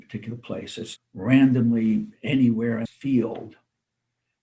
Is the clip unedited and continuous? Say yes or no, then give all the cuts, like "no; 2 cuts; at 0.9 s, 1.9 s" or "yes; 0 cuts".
no; 2 cuts; at 1.0 s, 2.9 s